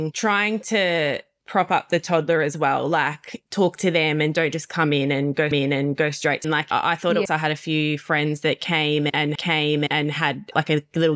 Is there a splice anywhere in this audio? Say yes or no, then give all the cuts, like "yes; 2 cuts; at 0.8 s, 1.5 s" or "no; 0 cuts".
yes; 4 cuts; at 5.5 s, 6.4 s, 7.3 s, 9.4 s